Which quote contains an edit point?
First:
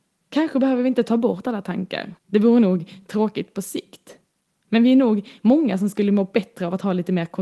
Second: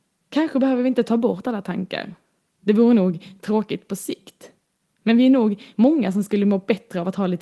first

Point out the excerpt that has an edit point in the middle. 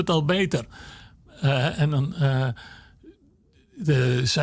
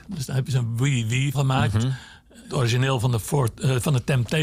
second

